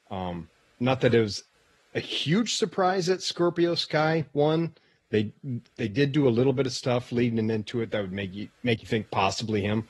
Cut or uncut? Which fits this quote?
uncut